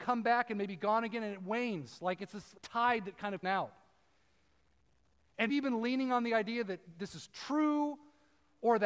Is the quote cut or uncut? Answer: cut